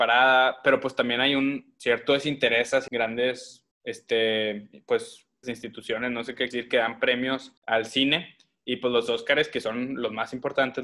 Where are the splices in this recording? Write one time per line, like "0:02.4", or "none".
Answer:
0:02.9
0:03.7
0:05.4
0:06.5
0:07.6